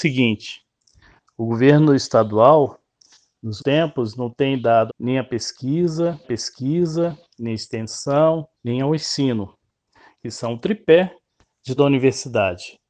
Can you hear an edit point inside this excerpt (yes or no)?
yes